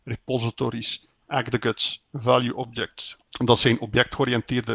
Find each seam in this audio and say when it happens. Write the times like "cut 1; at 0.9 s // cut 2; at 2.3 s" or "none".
cut 1; at 3.2 s